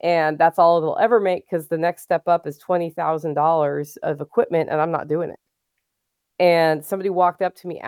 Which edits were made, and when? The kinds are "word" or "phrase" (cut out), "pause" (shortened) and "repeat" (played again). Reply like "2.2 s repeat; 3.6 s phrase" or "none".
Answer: none